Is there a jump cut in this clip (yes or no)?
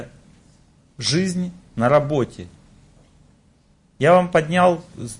no